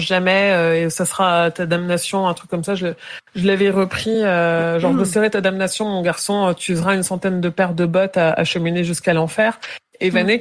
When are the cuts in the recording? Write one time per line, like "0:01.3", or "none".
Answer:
none